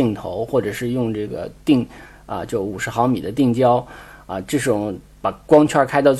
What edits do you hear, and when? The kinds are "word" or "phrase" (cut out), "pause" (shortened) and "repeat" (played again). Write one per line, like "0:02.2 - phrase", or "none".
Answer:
none